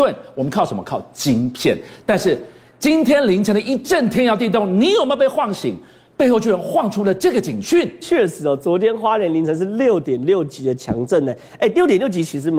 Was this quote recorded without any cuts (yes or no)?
yes